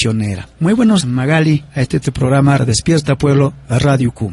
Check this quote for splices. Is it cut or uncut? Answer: cut